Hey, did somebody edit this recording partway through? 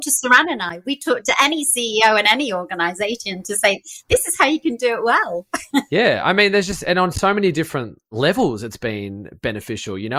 no; 0 cuts

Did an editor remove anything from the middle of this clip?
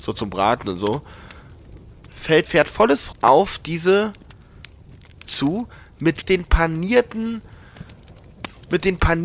yes; 4 cuts; at 2.5 s, 3.1 s, 5.3 s, 6.2 s

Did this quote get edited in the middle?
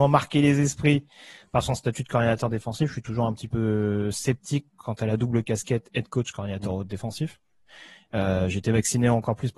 no; 0 cuts

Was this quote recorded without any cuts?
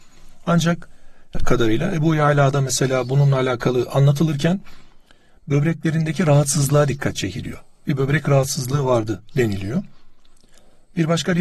no; 1 cut; at 1.3 s

